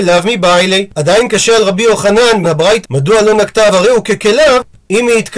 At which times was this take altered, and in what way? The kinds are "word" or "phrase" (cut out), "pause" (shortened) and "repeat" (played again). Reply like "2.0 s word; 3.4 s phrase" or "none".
0.9 s pause; 2.4 s word; 2.8 s word; 3.7 s phrase